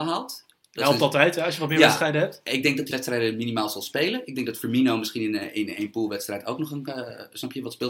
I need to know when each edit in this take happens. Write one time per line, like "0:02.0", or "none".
0:02.9